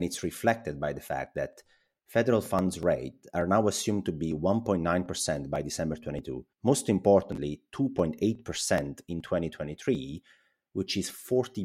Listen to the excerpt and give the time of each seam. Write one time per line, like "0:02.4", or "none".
0:06.5